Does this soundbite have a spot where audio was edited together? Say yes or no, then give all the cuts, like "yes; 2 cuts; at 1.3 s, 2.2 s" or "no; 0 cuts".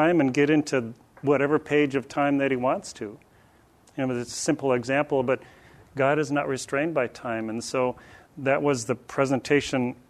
no; 0 cuts